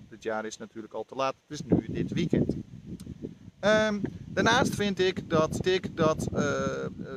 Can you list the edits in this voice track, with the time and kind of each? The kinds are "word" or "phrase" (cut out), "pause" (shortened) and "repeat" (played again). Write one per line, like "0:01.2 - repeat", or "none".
0:05.6 - repeat